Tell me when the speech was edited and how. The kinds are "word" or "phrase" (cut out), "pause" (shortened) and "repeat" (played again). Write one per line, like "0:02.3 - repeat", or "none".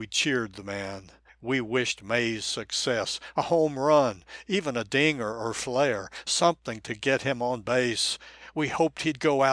0:01.3 - pause

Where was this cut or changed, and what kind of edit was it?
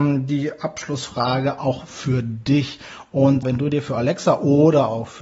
0:03.4 - word

